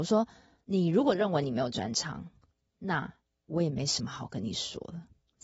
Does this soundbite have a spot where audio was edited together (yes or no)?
no